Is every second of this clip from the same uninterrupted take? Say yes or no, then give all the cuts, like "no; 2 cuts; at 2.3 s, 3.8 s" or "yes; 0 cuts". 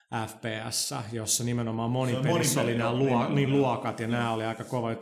yes; 0 cuts